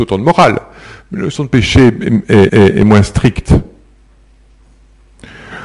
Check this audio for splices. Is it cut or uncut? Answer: cut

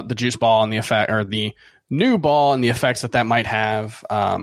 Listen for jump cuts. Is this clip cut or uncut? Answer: uncut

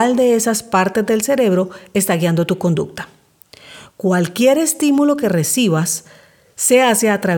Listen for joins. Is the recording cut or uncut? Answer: uncut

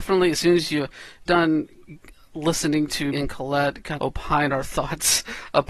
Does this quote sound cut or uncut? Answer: cut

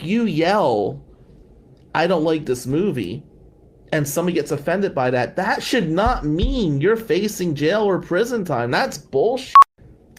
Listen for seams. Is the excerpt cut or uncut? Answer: uncut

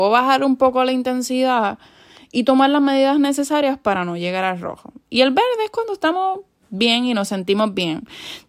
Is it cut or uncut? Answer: uncut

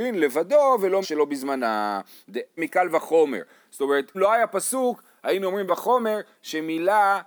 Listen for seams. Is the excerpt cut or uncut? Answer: cut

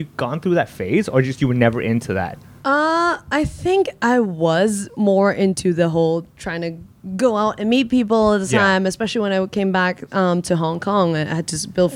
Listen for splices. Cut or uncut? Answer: uncut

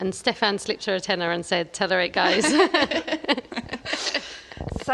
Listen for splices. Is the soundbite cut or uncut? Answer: uncut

